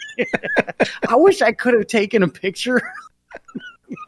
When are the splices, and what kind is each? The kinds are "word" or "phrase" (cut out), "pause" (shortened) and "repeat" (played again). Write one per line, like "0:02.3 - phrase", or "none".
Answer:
none